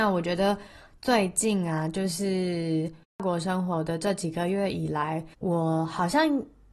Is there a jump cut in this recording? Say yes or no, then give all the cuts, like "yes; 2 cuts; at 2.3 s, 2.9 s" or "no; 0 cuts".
yes; 2 cuts; at 3.0 s, 5.3 s